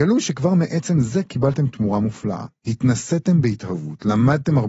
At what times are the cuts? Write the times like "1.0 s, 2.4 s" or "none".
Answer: none